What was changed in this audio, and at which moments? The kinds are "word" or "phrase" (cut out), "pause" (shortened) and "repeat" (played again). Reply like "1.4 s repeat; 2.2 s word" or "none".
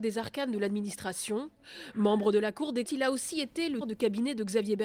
2.9 s word; 3.8 s word